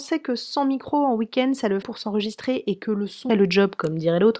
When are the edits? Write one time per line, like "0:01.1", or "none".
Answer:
0:01.8
0:03.3